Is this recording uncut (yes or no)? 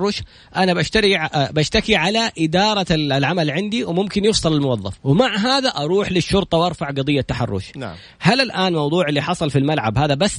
no